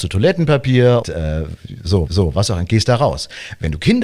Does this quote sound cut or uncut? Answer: cut